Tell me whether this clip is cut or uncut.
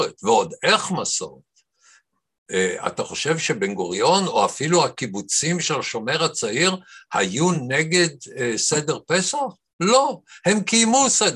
uncut